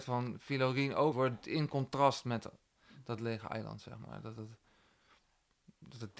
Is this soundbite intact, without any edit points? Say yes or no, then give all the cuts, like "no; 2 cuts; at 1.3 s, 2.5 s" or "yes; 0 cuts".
no; 1 cut; at 1.1 s